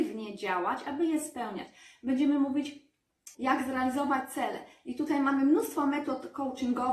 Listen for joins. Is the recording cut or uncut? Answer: cut